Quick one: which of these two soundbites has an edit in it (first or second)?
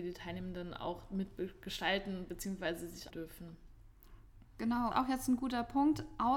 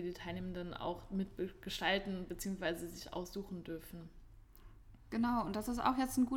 first